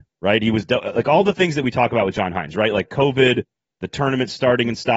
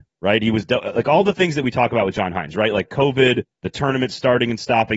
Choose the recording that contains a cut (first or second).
second